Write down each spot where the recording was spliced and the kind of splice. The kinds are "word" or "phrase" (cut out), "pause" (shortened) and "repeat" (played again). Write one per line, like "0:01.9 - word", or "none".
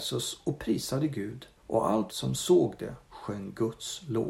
0:01.6 - pause
0:02.1 - word